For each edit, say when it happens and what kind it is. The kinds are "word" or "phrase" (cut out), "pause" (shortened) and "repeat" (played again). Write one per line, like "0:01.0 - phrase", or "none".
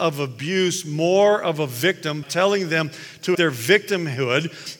0:02.2 - word
0:03.3 - word